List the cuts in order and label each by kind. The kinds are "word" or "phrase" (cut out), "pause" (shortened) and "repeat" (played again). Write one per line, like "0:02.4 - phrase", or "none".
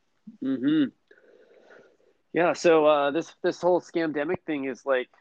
none

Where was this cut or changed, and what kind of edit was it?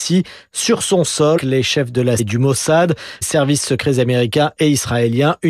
0:01.4 - word
0:02.2 - word
0:03.2 - word

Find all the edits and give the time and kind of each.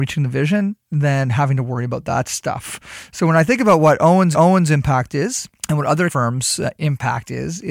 0:04.3 - repeat
0:05.6 - pause
0:06.1 - word

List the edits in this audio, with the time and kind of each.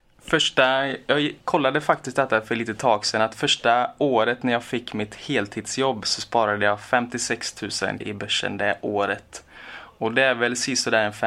0:01.4 - pause
0:08.0 - word

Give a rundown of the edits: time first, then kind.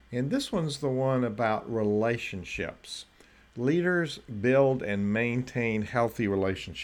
none

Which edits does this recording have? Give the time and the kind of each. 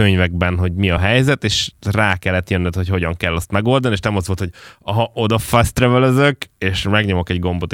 none

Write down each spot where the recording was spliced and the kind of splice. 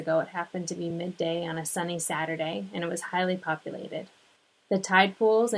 none

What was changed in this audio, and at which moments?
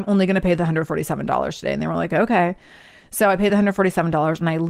none

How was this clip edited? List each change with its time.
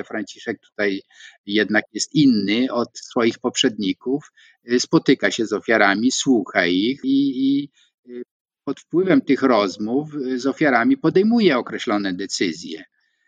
0:07.0 - word

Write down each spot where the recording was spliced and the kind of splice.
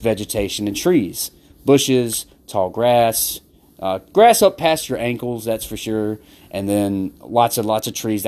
none

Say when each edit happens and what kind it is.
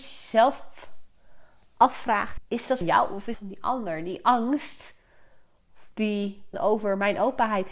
0:02.4 - word
0:02.8 - word
0:03.3 - word
0:06.5 - word

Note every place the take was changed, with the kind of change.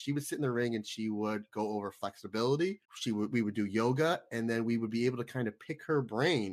0:02.8 - pause

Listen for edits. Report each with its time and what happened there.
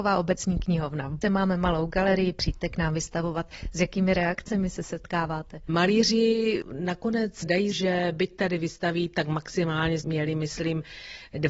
0:01.2 - word
0:07.7 - word
0:10.0 - phrase

